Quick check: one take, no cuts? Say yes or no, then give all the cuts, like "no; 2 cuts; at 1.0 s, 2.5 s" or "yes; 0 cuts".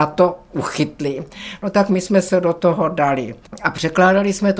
yes; 0 cuts